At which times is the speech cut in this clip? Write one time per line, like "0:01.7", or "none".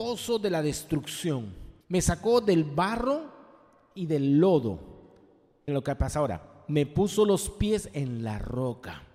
0:01.8
0:05.7